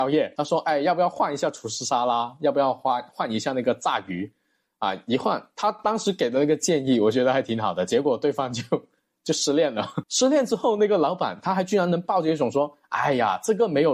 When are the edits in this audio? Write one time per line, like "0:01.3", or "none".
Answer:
none